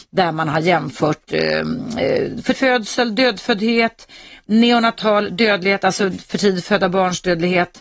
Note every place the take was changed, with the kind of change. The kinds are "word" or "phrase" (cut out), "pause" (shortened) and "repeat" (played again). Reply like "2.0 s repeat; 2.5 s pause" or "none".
2.5 s word